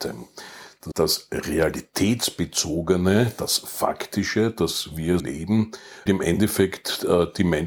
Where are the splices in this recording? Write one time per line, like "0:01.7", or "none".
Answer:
0:00.9
0:05.2
0:06.1